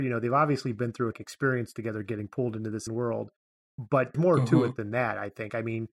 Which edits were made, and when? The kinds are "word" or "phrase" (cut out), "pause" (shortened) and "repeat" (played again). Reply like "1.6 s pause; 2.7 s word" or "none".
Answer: 1.1 s word; 2.9 s word; 4.1 s word